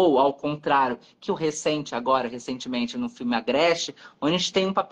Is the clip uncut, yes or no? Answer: no